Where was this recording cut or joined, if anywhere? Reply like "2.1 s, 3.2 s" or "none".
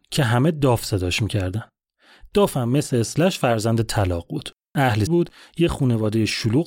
5.1 s